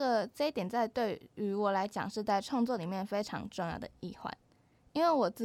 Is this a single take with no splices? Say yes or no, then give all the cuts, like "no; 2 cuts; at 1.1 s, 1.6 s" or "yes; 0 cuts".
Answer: yes; 0 cuts